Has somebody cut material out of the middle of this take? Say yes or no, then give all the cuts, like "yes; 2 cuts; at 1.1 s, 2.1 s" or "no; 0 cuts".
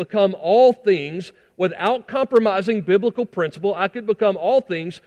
no; 0 cuts